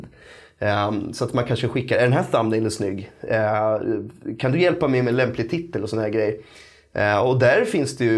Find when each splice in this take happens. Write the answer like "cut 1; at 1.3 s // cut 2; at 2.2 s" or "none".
none